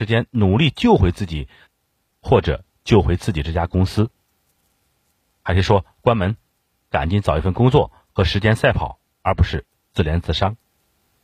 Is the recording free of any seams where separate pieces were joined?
yes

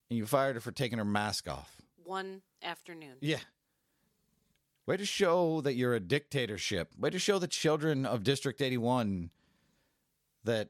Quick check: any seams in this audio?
no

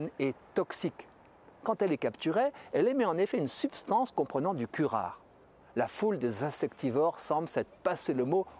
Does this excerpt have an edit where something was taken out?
no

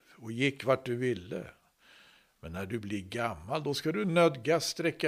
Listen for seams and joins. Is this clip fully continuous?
yes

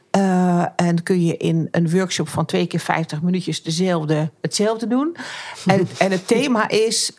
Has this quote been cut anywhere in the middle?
no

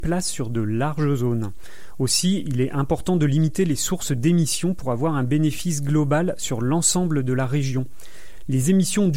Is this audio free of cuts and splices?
yes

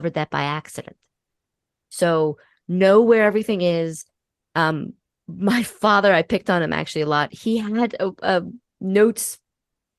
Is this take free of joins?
yes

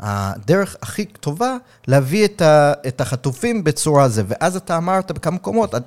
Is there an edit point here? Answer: no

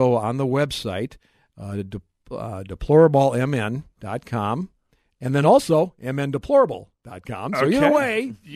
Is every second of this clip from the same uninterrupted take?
yes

